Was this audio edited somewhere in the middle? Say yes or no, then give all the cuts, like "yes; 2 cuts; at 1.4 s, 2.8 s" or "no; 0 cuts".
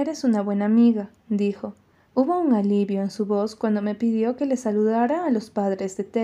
no; 0 cuts